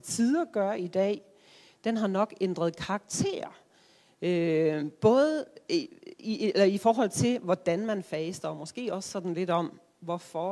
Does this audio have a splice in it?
no; 0 cuts

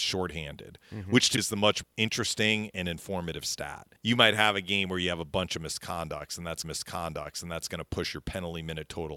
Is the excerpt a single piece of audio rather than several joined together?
no; 4 cuts; at 1.4 s, 1.8 s, 4.0 s, 6.6 s

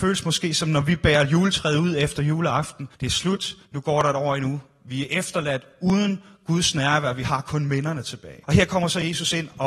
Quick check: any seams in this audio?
yes; 3 cuts; at 2.9 s, 3.7 s, 8.4 s

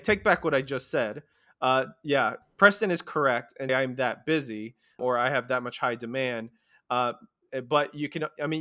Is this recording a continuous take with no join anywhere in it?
no; 2 cuts; at 3.7 s, 5.0 s

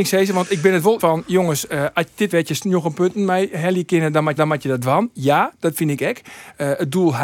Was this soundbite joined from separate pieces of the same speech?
yes; 3 cuts; at 1.0 s, 2.3 s, 4.4 s

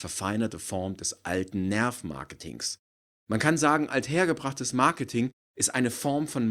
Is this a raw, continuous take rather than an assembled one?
yes; 0 cuts

